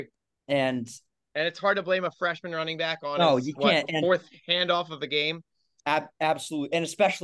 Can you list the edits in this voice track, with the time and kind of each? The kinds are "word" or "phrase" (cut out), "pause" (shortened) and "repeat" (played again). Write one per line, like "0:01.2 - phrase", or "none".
none